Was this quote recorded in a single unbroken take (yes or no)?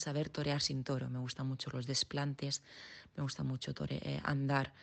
yes